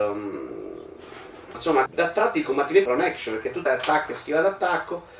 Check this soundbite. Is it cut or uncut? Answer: cut